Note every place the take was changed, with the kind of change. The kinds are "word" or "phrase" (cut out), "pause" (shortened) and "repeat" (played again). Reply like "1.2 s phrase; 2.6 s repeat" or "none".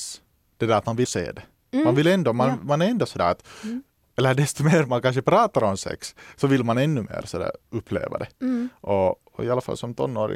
1.0 s word

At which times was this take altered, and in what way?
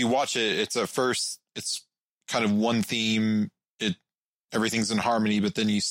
none

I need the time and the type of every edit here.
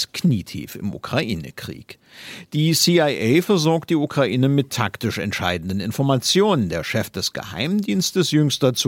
none

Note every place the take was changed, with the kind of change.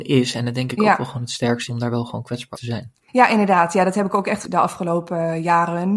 1.7 s word; 2.5 s word; 3.1 s pause; 4.4 s word

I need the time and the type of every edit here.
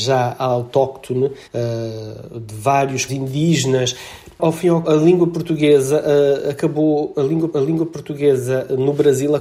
1.4 s pause; 3.1 s word; 4.3 s pause; 4.8 s word; 7.5 s repeat

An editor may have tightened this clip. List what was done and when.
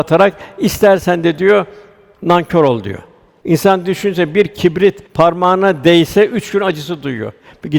5.1 s pause

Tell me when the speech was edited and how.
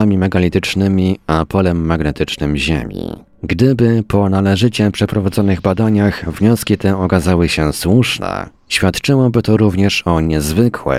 none

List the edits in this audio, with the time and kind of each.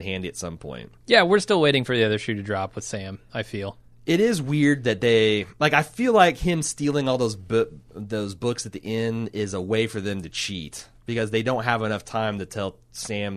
none

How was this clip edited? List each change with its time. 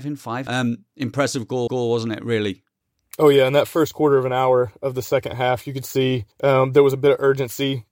1.7 s repeat; 6.3 s pause

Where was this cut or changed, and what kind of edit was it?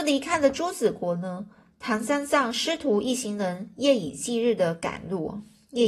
none

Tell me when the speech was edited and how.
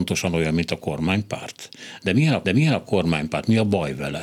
2.4 s repeat

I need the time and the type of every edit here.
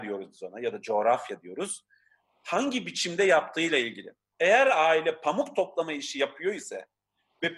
none

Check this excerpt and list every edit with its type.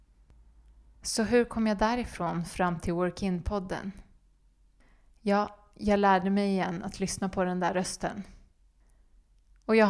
none

